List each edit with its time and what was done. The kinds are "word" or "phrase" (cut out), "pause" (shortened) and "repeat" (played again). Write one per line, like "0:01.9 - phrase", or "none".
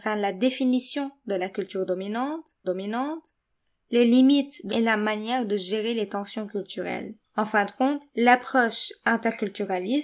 0:02.6 - repeat
0:04.7 - word
0:07.2 - pause
0:08.1 - pause